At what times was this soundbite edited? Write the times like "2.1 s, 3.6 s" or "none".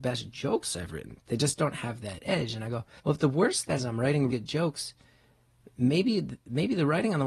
3.0 s, 3.8 s, 4.3 s